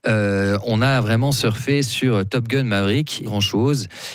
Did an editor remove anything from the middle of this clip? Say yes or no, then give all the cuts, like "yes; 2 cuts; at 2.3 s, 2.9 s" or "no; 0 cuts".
yes; 1 cut; at 3.3 s